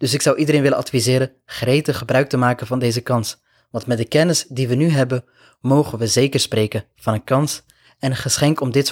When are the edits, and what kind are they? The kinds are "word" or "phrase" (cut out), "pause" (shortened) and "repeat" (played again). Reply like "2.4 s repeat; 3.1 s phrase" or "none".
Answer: none